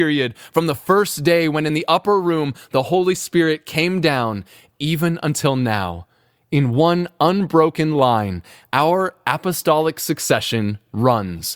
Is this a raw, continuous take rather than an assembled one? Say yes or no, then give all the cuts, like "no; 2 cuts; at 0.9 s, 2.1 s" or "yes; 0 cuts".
yes; 0 cuts